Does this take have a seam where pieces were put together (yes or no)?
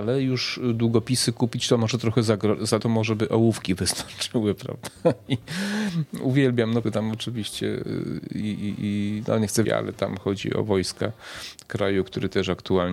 yes